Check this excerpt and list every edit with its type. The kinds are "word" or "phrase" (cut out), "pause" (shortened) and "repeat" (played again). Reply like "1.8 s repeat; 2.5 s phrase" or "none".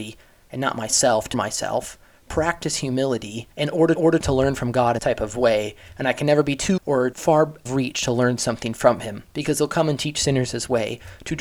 1.3 s word; 3.5 s pause; 4.0 s repeat; 5.0 s word; 6.8 s word; 7.1 s word; 7.7 s phrase